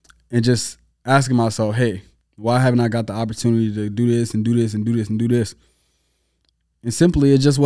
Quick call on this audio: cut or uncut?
uncut